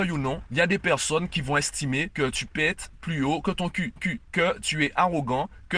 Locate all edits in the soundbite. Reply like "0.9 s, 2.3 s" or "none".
4.0 s